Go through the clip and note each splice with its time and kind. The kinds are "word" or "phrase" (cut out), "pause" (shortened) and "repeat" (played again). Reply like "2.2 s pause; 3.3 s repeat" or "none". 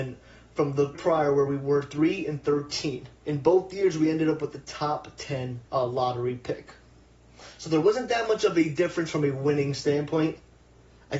0.9 s word; 3.2 s pause; 5.7 s pause